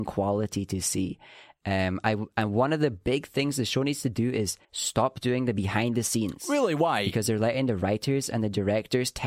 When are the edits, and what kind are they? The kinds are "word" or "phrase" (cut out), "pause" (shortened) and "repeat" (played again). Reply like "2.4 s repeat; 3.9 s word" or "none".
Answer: 4.6 s pause